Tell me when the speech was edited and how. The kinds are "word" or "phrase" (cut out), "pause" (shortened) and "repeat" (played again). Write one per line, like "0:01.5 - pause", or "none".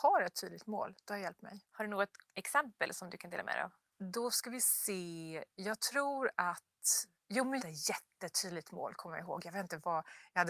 0:01.6 - pause
0:02.2 - word
0:07.6 - phrase

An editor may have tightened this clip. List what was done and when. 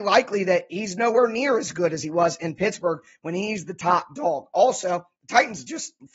none

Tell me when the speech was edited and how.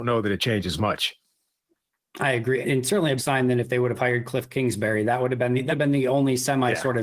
0:02.6 - word
0:03.2 - word
0:05.7 - word

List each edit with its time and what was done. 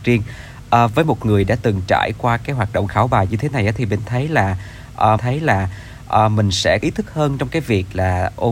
0:05.2 - repeat
0:06.8 - word

